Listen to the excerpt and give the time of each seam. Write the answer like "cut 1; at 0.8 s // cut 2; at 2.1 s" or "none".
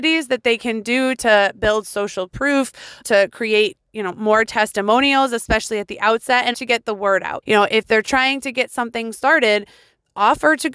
cut 1; at 3.0 s // cut 2; at 6.5 s // cut 3; at 7.4 s